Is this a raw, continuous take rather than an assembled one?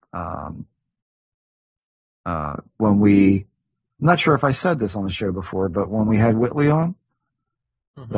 yes; 0 cuts

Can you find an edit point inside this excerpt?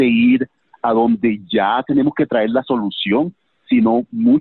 no; 0 cuts

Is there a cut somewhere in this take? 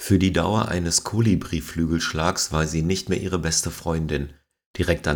no; 0 cuts

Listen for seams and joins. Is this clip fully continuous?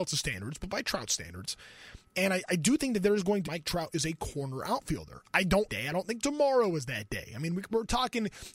no; 3 cuts; at 2.1 s, 3.4 s, 5.7 s

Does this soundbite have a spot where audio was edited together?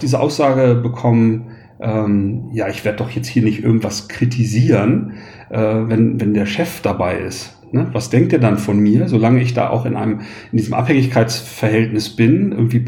no; 0 cuts

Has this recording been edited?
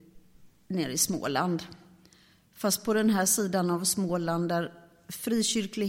no; 0 cuts

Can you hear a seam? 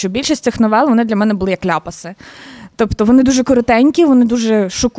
no; 0 cuts

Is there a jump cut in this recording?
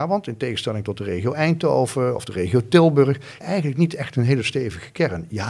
yes; 1 cut; at 3.4 s

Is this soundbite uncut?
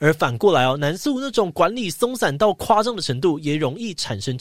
yes; 0 cuts

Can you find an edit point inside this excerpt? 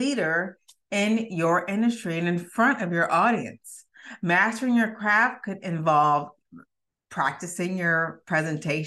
no; 0 cuts

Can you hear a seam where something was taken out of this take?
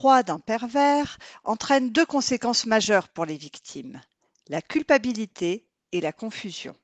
no; 0 cuts

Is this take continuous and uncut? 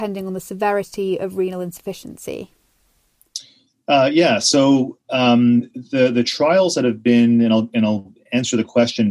yes; 0 cuts

